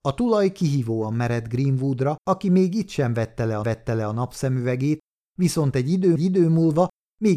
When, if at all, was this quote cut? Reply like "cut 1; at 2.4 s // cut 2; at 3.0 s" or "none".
cut 1; at 2.2 s // cut 2; at 3.6 s // cut 3; at 6.2 s